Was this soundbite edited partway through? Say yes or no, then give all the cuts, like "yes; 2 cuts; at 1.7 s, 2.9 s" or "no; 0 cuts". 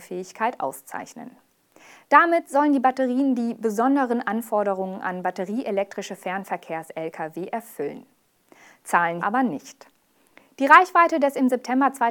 yes; 1 cut; at 9.2 s